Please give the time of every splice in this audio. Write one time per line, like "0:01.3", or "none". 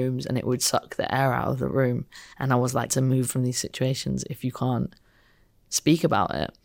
0:02.3
0:02.9
0:03.3